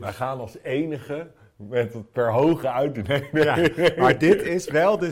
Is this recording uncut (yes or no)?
yes